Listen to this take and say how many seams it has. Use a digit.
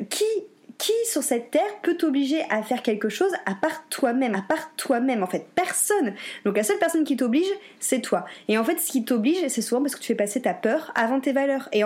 1